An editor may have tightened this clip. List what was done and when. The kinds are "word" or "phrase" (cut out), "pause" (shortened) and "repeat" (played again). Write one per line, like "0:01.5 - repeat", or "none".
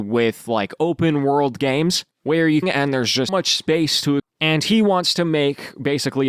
0:02.1 - pause
0:02.6 - phrase
0:03.3 - word
0:04.2 - word